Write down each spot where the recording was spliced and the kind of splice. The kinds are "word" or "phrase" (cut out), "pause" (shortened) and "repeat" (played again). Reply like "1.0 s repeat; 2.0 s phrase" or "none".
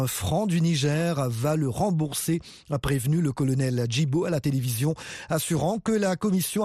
none